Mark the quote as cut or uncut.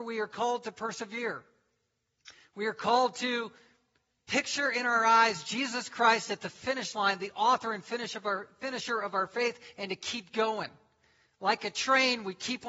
uncut